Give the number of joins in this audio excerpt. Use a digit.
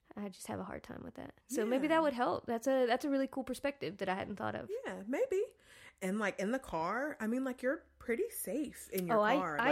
1